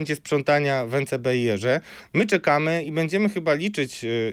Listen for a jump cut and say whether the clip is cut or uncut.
uncut